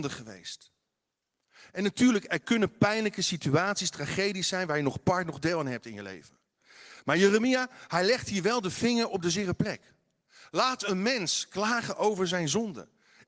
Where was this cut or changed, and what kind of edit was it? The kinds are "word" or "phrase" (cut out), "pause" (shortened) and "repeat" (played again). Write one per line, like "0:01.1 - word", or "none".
none